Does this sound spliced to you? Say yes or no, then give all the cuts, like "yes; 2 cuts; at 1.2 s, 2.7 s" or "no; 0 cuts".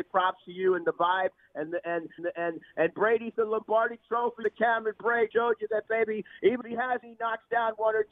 yes; 6 cuts; at 2.2 s, 3.3 s, 4.4 s, 5.3 s, 6.6 s, 7.0 s